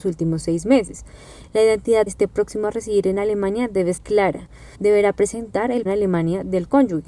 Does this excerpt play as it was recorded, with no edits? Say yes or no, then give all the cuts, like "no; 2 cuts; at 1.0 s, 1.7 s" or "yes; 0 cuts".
no; 4 cuts; at 2.1 s, 4.0 s, 4.7 s, 5.8 s